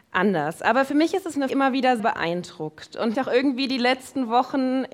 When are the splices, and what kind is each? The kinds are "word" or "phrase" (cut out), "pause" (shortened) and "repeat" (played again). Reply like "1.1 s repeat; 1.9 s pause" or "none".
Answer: 1.5 s phrase; 2.0 s word; 3.1 s word